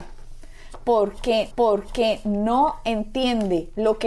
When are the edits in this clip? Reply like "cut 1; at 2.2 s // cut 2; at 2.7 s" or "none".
cut 1; at 1.5 s

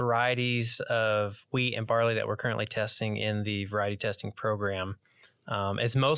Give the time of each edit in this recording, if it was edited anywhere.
none

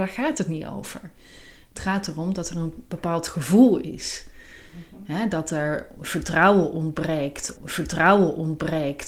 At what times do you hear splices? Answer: cut 1; at 7.6 s

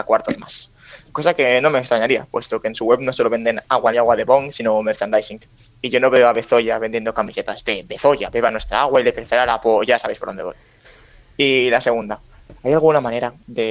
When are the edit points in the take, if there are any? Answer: cut 1; at 3.9 s

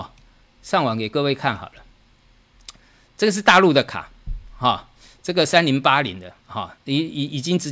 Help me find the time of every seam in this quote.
none

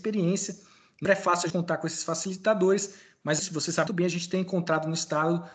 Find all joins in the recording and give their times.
cut 1; at 1.0 s // cut 2; at 1.5 s // cut 3; at 3.4 s // cut 4; at 3.9 s

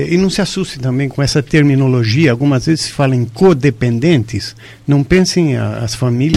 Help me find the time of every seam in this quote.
none

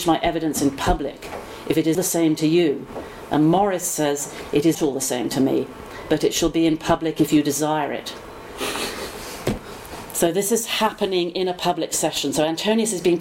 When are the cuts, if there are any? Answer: cut 1; at 1.9 s // cut 2; at 4.7 s

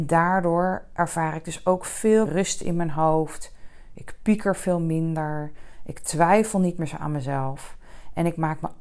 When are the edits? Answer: cut 1; at 2.3 s

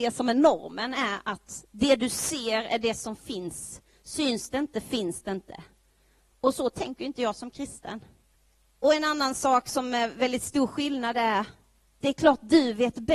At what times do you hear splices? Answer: cut 1; at 8.3 s

